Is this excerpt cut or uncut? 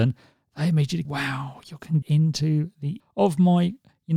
cut